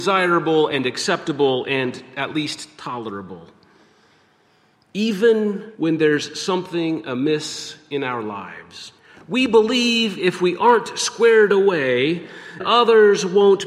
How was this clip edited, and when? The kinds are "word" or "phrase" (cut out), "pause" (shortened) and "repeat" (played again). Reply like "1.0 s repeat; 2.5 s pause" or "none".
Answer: 5.7 s pause; 9.0 s pause; 12.6 s word